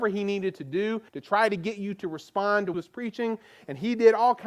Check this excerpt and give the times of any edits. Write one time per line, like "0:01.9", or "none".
0:01.1
0:02.7